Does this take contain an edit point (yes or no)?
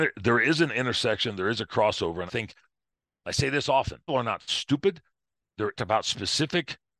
yes